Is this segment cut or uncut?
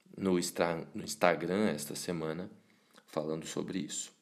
uncut